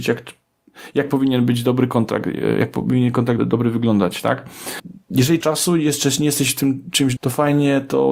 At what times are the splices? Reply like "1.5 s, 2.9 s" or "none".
3.4 s, 5.4 s, 7.2 s